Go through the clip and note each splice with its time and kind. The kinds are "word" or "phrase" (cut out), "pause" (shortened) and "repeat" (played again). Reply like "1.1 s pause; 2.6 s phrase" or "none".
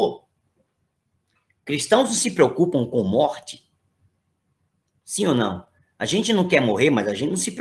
none

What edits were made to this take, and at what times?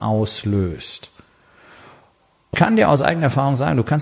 2.5 s word

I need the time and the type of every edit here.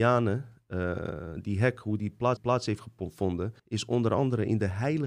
2.4 s repeat; 3.6 s pause

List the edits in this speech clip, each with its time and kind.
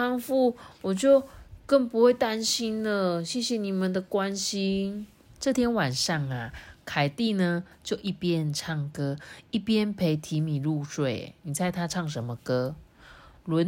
5.2 s pause

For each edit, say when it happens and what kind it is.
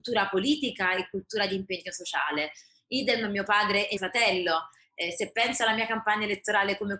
4.0 s word

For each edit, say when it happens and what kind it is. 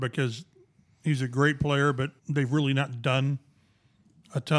2.2 s pause

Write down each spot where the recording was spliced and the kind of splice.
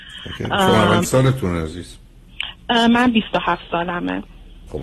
1.0 s word

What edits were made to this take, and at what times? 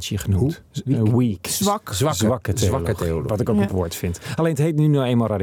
3.7 s word

